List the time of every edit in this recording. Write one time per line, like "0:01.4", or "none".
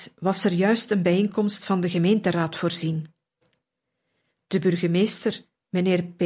none